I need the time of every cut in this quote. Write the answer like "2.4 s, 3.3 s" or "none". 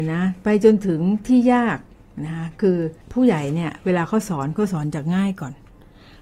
3.0 s